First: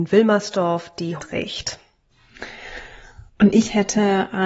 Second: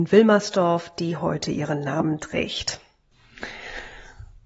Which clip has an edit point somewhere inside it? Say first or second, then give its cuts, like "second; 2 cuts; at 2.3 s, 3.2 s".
first; 2 cuts; at 1.2 s, 3.3 s